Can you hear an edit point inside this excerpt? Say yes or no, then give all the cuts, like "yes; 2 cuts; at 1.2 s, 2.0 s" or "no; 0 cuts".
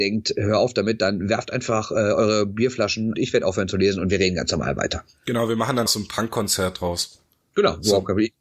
yes; 2 cuts; at 3.1 s, 5.9 s